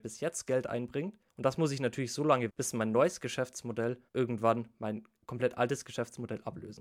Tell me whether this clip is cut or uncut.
cut